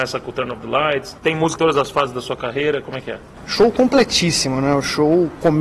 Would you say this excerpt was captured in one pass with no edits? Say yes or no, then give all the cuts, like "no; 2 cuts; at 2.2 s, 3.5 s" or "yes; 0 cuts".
no; 2 cuts; at 1.2 s, 1.6 s